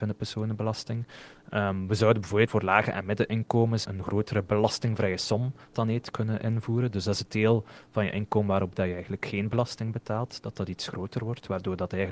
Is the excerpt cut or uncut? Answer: cut